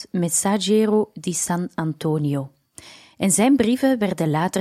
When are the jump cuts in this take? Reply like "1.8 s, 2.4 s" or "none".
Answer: none